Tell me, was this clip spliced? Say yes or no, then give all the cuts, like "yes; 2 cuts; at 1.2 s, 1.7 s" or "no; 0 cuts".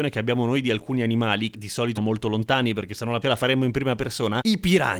yes; 3 cuts; at 1.5 s, 2.0 s, 3.2 s